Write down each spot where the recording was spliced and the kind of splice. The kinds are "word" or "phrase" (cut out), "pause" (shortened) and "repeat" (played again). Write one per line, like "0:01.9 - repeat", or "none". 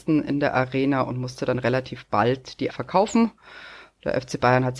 0:02.7 - word